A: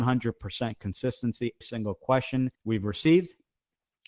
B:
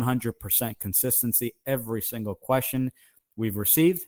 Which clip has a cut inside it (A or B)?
A